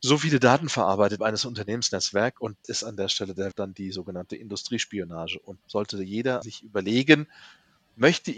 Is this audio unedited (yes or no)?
no